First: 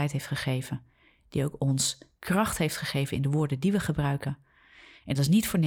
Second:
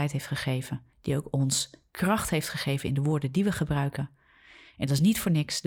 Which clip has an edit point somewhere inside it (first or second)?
second